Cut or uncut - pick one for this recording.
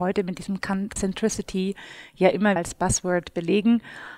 cut